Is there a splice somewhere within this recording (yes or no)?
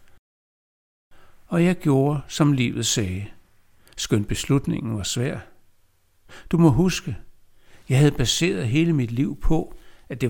no